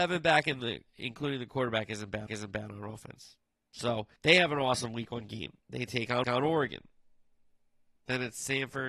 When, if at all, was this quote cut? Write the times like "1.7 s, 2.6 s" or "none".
2.3 s, 4.2 s, 5.6 s, 6.2 s